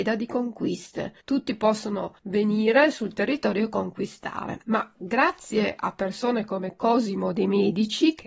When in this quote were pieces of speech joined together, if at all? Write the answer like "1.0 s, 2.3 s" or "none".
1.2 s, 2.2 s, 4.6 s

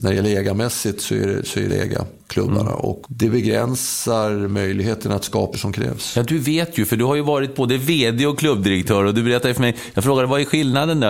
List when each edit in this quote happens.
1.7 s, 2.2 s, 3.0 s, 5.5 s

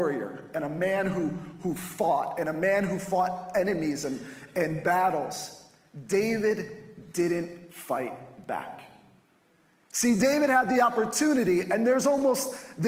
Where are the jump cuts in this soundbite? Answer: none

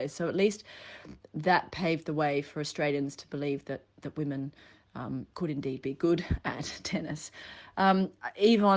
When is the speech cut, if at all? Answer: 5.3 s

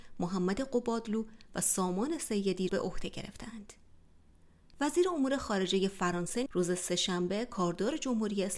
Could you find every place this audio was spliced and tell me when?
2.7 s, 6.5 s

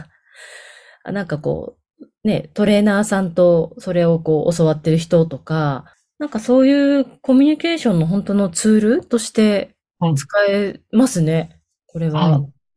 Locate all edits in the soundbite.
5.9 s

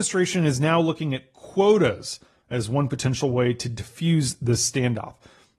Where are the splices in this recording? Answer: none

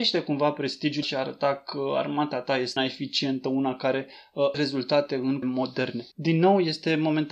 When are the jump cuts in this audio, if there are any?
1.0 s, 2.8 s, 4.5 s, 5.4 s, 6.1 s

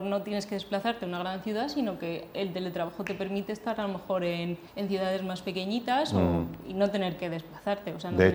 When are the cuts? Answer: 4.7 s

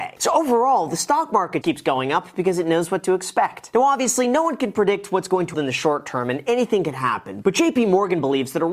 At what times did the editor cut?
1.6 s, 5.5 s

